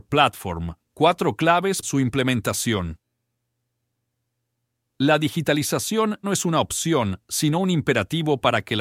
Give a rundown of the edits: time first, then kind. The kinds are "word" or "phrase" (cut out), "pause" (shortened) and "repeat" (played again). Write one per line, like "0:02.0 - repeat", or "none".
0:01.8 - word
0:06.2 - word